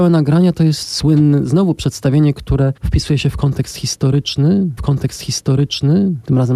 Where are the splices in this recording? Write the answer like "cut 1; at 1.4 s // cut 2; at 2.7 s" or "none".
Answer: cut 1; at 2.8 s // cut 2; at 4.8 s